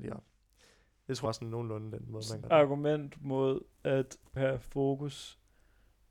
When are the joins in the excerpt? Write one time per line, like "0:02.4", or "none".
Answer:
0:01.3
0:02.4
0:04.4

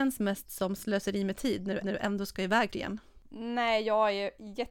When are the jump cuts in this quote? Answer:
0:01.8
0:02.7

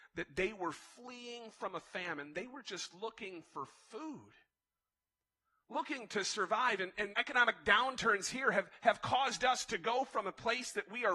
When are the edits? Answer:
0:07.1

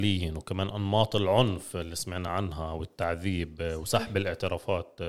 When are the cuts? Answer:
none

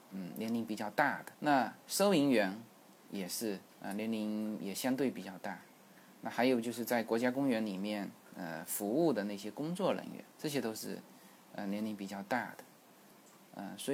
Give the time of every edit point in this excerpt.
0:01.3
0:03.7
0:10.3

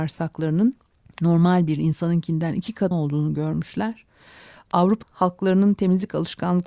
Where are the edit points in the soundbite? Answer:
0:00.9
0:02.9
0:05.0

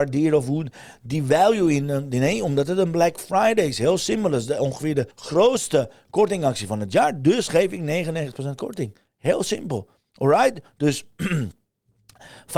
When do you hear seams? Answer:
0:05.1

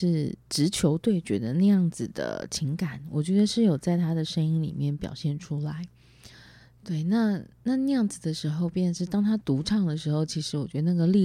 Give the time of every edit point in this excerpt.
none

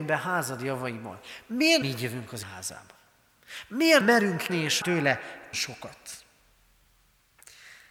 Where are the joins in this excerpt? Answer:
0:01.8
0:02.4
0:04.0
0:04.5
0:04.8
0:05.5

